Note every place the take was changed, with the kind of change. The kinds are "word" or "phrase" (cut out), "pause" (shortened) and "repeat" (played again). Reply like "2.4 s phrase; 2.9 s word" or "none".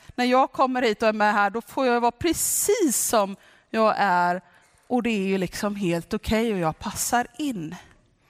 none